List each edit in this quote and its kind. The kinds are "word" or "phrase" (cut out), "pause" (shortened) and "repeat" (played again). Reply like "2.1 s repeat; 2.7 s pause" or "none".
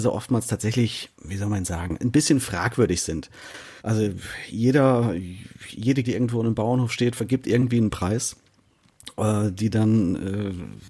1.1 s pause; 3.8 s pause; 6.0 s word